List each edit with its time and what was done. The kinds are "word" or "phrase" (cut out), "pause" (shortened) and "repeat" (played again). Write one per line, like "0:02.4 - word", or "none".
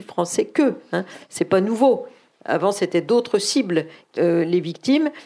0:04.2 - word